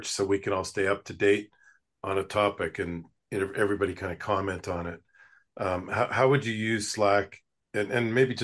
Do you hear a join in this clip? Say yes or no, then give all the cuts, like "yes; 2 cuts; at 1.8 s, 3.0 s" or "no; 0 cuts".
no; 0 cuts